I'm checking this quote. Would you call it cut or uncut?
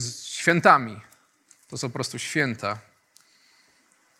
uncut